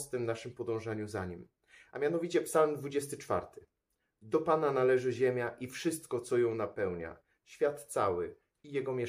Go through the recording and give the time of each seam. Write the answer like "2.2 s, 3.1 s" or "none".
none